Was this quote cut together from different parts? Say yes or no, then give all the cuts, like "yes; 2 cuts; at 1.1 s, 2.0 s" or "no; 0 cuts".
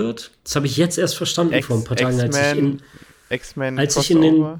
no; 0 cuts